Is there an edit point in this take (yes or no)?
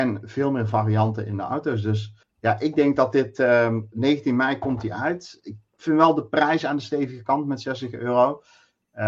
yes